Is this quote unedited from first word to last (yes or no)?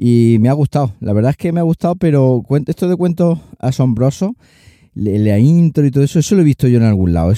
yes